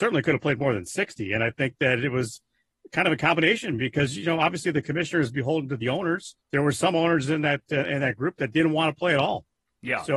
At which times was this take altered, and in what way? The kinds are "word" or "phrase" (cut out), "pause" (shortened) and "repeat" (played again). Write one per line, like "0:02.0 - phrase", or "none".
0:06.4 - pause